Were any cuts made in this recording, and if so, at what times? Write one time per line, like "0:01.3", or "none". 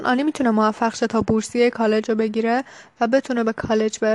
none